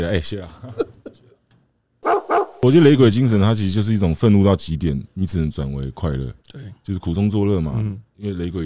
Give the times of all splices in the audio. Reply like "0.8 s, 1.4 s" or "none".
6.4 s